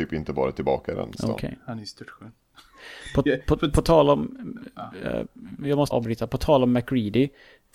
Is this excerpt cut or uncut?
cut